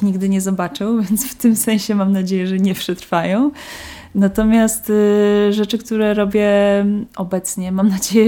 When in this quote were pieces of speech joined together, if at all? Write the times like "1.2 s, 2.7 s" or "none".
none